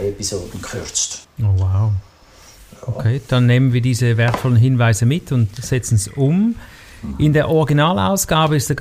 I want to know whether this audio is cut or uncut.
cut